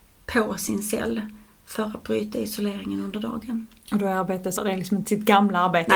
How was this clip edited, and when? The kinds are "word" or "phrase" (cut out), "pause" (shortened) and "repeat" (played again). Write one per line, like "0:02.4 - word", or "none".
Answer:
0:04.6 - phrase
0:05.0 - word